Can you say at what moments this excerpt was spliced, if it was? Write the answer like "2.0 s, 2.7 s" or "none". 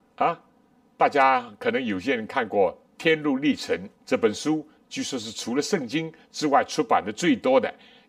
4.0 s